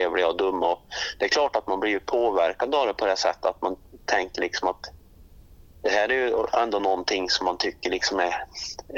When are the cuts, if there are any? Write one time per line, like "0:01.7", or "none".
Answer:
none